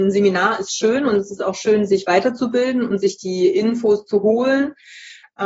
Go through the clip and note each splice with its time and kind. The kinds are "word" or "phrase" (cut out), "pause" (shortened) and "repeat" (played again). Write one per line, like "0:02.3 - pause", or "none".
none